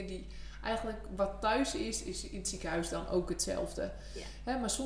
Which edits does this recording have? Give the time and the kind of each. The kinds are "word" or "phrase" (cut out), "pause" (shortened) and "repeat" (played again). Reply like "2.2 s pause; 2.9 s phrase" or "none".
none